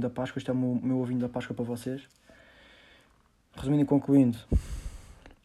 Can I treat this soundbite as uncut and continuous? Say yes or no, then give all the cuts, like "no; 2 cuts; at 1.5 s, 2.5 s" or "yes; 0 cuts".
yes; 0 cuts